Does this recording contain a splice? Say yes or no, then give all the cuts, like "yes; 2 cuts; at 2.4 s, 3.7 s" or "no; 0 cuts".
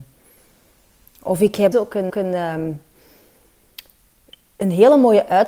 yes; 2 cuts; at 1.7 s, 2.1 s